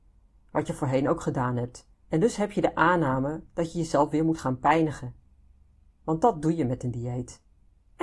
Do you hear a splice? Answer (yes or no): yes